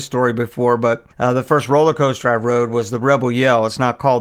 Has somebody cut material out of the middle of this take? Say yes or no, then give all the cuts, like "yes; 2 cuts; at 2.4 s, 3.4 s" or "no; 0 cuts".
yes; 1 cut; at 1.1 s